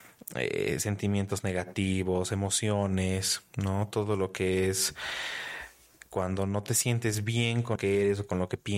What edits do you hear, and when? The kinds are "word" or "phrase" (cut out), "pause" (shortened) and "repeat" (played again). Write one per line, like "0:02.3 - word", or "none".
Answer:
0:07.8 - word